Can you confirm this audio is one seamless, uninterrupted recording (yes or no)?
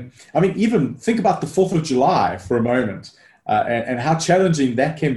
yes